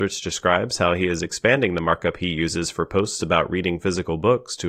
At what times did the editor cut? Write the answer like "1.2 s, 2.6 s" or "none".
none